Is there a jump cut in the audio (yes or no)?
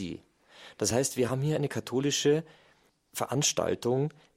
no